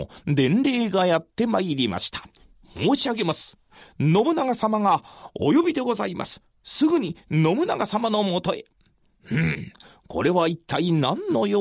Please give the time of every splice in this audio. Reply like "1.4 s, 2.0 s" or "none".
none